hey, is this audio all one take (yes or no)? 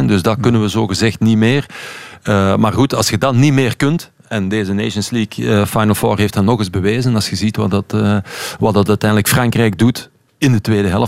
yes